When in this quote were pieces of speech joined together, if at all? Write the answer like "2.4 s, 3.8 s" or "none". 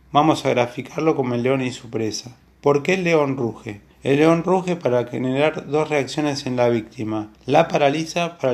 3.9 s, 7.4 s

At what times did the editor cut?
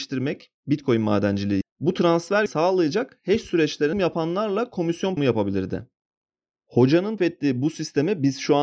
1.6 s, 2.5 s, 3.9 s, 5.2 s, 7.2 s

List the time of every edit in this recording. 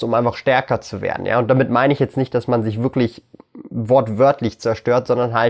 none

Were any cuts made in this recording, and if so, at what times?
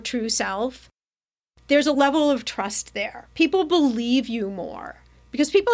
none

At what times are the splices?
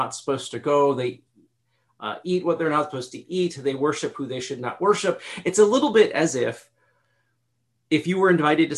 none

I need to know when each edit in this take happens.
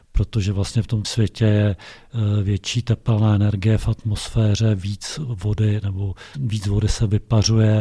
1.0 s, 6.3 s

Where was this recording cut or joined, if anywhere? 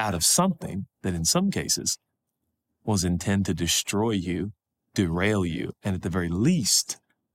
none

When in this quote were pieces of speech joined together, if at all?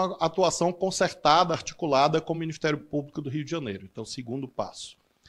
none

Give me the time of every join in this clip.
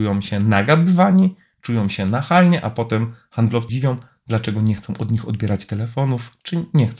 3.7 s

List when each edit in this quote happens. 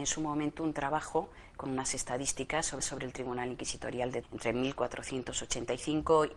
2.8 s, 4.2 s

